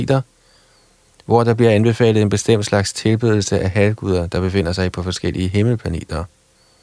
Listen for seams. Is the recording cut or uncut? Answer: uncut